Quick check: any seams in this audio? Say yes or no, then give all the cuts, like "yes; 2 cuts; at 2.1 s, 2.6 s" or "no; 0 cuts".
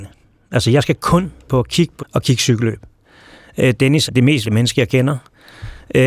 yes; 4 cuts; at 1.5 s, 2.0 s, 4.1 s, 4.4 s